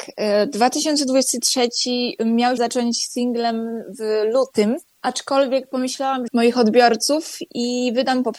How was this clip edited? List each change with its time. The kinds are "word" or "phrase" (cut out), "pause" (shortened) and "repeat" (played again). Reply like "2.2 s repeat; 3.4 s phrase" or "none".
2.6 s word; 4.9 s pause; 6.3 s phrase